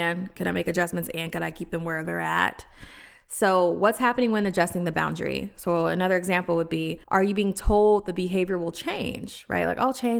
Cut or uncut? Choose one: cut